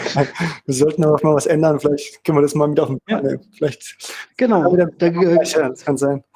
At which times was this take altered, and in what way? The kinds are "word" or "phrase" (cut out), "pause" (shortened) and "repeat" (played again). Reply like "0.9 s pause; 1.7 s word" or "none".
1.2 s word

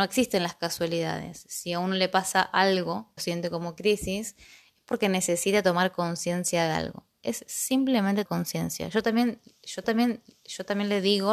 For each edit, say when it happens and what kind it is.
3.2 s phrase; 8.3 s word; 9.8 s repeat

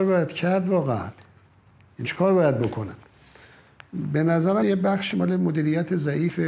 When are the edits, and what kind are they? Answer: 2.0 s word; 4.6 s word; 5.1 s word

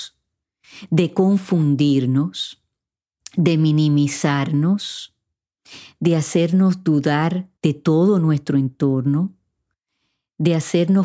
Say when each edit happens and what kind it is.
7.6 s pause

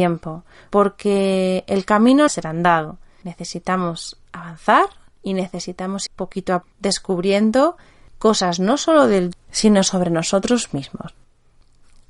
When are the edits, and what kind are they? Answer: 2.3 s word; 6.1 s word; 6.6 s word; 9.3 s word

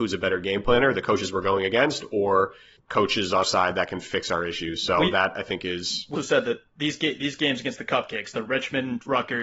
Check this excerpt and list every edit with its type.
2.8 s word; 3.4 s word; 6.2 s word

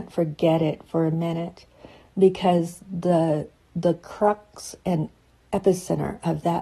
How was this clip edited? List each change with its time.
none

